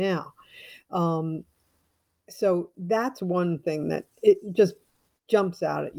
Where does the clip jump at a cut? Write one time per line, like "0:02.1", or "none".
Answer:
0:02.7

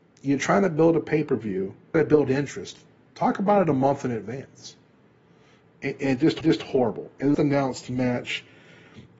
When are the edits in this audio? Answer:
0:01.9
0:06.4
0:07.3

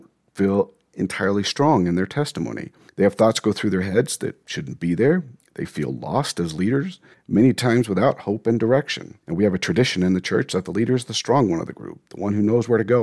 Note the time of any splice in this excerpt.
0:02.9
0:07.1
0:09.2

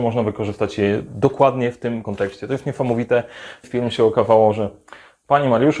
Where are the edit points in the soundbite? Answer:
0:02.0
0:03.6

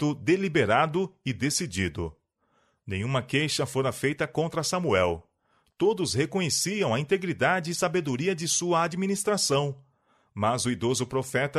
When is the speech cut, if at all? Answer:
none

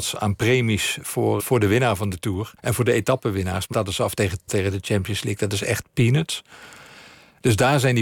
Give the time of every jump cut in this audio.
0:01.4
0:02.6
0:03.7
0:04.5

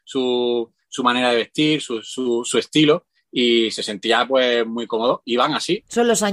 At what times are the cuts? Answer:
0:05.2

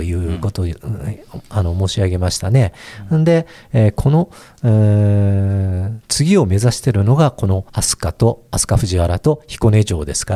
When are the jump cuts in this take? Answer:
0:07.7

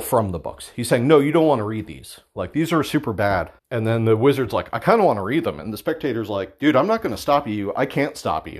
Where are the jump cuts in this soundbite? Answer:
0:03.6

